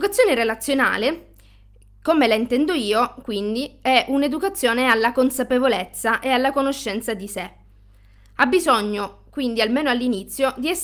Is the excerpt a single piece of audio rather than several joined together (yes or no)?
yes